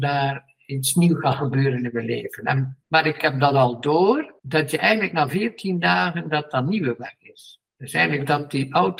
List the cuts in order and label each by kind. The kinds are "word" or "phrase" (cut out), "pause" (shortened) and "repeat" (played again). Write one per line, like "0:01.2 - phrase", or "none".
0:02.8 - pause
0:04.4 - pause
0:07.7 - pause